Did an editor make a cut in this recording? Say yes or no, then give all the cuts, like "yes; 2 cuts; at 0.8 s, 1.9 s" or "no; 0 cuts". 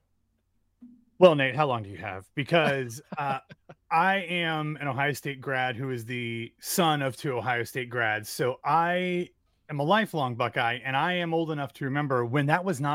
no; 0 cuts